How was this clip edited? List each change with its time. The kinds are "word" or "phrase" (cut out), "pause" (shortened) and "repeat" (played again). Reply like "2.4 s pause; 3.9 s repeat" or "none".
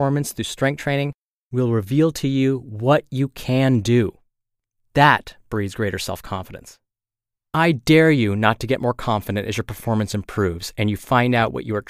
none